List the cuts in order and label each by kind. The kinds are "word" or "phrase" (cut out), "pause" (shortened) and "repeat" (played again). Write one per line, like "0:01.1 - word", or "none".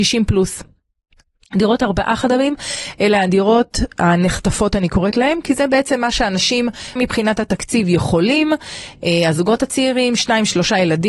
0:07.0 - word

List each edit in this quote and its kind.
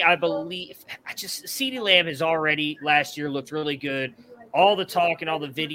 none

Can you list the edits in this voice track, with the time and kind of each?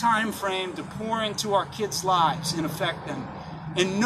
none

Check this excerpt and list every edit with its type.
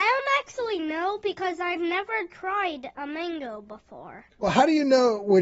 0:04.3 - pause

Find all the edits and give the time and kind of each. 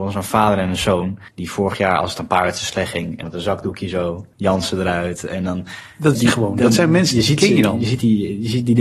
0:01.3 - pause
0:03.2 - phrase
0:04.3 - pause
0:06.1 - word

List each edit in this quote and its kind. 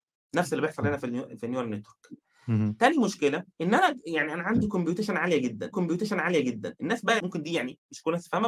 0:03.5 - pause
0:05.7 - repeat
0:07.2 - word

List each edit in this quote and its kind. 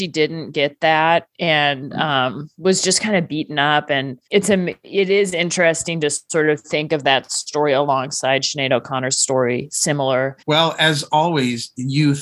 0:04.3 - pause
0:10.4 - pause

